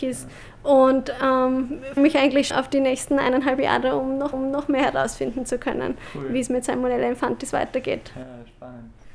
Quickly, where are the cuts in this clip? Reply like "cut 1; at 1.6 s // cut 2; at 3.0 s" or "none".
cut 1; at 2.0 s // cut 2; at 2.5 s // cut 3; at 4.3 s